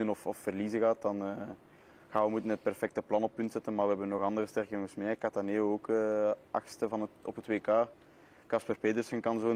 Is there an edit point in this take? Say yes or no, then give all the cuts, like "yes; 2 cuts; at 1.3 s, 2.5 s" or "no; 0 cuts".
no; 0 cuts